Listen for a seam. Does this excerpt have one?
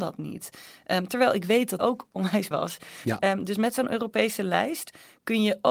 yes; 2 cuts; at 1.8 s, 2.5 s

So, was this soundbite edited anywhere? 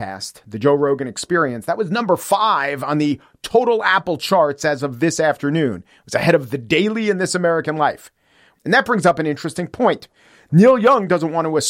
no; 0 cuts

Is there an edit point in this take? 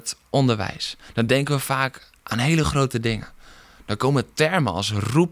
no; 0 cuts

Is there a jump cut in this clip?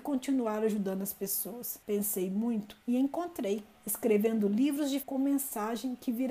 yes; 3 cuts; at 1.8 s, 3.7 s, 5.0 s

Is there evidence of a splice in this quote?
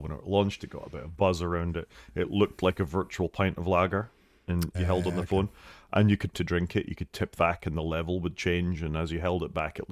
yes; 2 cuts; at 6.3 s, 7.4 s

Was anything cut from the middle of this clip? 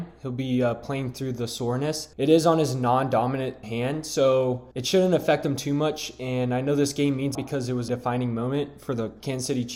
yes; 5 cuts; at 2.1 s, 3.6 s, 4.7 s, 7.3 s, 7.9 s

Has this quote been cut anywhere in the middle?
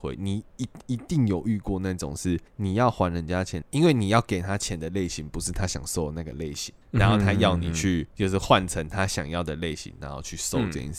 yes; 4 cuts; at 2.5 s, 3.6 s, 6.8 s, 8.1 s

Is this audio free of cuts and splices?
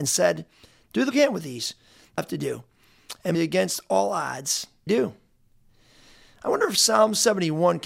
no; 4 cuts; at 1.1 s, 2.2 s, 3.3 s, 4.9 s

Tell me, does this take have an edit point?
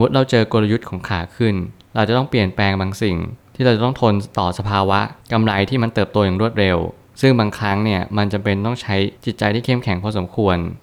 yes; 1 cut; at 9.1 s

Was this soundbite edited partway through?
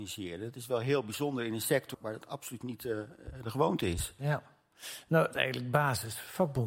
yes; 2 cuts; at 1.9 s, 5.3 s

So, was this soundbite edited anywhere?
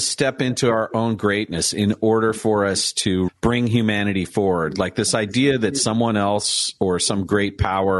yes; 1 cut; at 3.3 s

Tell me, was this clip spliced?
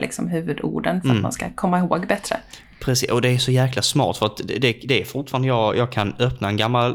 no; 0 cuts

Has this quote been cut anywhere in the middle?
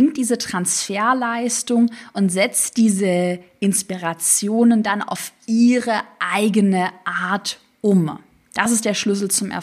no; 0 cuts

